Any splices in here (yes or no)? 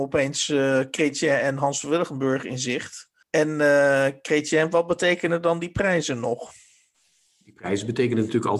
yes